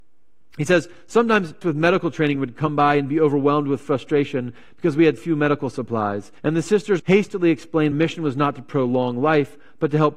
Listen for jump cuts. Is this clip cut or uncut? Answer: cut